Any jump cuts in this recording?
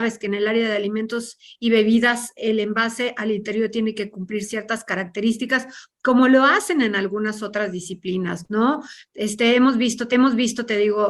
yes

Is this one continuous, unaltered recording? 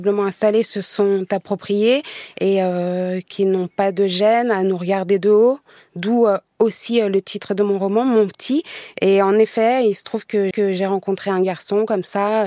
no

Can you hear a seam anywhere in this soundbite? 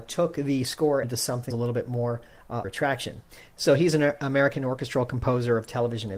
yes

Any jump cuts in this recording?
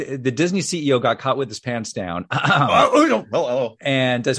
no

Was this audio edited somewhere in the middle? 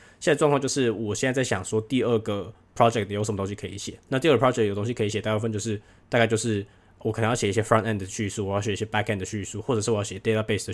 no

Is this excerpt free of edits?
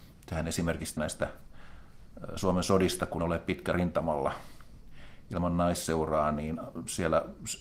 no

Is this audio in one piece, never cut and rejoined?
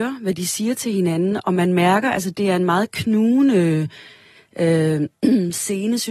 yes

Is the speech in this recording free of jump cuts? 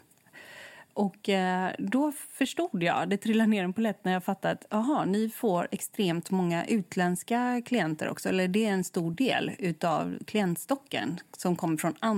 yes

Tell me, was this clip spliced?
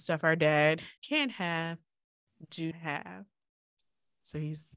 yes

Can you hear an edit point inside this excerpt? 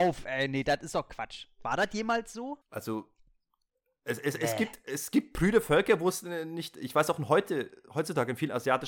yes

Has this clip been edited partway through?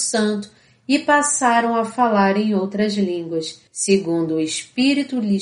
yes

